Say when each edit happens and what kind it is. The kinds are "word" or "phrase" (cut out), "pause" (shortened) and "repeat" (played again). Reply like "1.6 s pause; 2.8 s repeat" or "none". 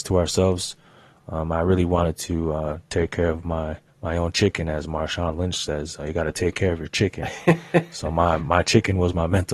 3.9 s pause; 8.4 s word